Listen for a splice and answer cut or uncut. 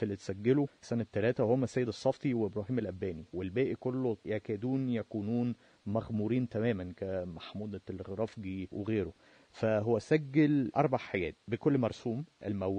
uncut